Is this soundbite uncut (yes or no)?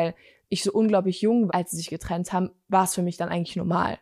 no